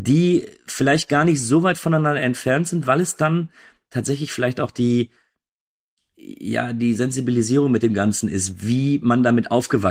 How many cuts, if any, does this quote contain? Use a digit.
0